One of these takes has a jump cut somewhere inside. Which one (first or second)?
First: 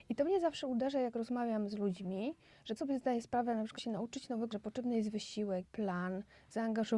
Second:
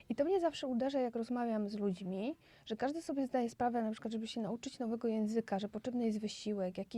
first